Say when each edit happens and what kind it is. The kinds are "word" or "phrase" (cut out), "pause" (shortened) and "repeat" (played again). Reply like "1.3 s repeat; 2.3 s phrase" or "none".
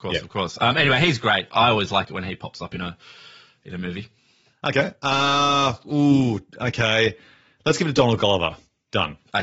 none